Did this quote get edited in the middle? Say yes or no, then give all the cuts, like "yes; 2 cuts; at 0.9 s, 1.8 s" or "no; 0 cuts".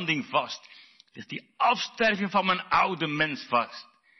no; 0 cuts